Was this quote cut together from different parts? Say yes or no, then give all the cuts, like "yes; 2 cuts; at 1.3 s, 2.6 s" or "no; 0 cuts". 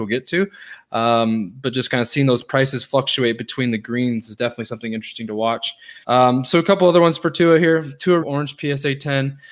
yes; 2 cuts; at 6.0 s, 8.2 s